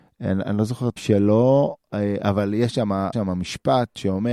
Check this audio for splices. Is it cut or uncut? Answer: cut